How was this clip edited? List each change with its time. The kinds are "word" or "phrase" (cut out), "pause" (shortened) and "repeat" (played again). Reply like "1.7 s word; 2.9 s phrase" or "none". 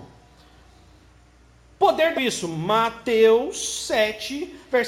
2.2 s phrase

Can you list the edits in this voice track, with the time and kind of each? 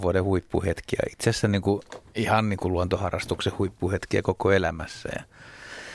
none

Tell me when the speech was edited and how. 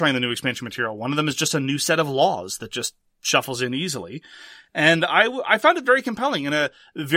none

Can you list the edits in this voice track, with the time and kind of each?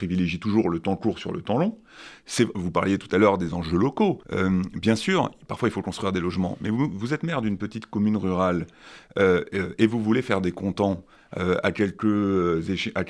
4.2 s pause

